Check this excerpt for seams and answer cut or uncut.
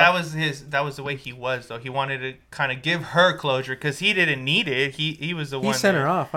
uncut